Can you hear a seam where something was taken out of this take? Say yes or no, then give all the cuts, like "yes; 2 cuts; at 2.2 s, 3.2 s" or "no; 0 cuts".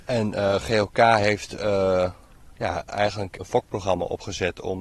yes; 1 cut; at 3.4 s